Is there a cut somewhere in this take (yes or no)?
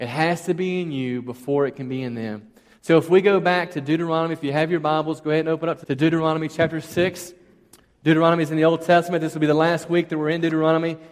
yes